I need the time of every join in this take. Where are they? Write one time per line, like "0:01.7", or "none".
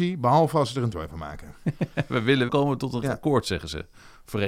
0:00.9
0:02.5
0:03.0

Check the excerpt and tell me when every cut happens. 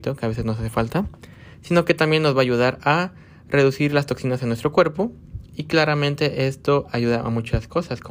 0:01.5

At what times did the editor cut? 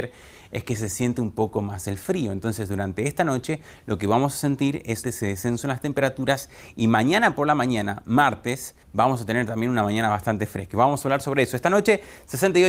0:05.0
0:08.8

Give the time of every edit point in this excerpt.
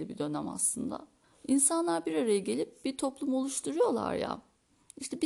0:01.2

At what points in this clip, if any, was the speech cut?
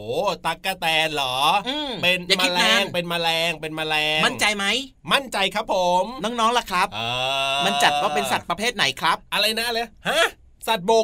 0:09.3

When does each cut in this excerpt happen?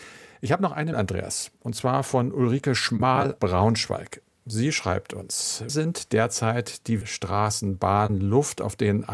0:00.9
0:03.4
0:05.7
0:07.0

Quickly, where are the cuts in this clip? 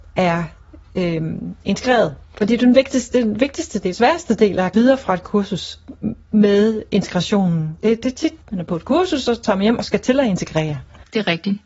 0:02.2
0:03.9
0:04.7
0:08.4

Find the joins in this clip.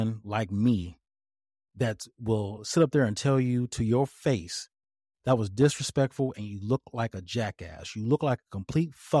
none

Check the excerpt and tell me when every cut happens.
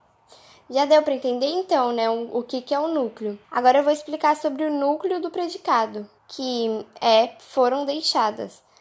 0:03.4
0:06.2

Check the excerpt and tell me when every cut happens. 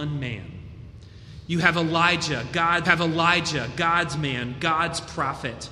0:02.8

